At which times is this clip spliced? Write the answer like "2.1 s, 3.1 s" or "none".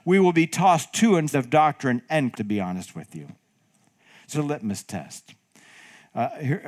1.3 s, 2.3 s, 4.3 s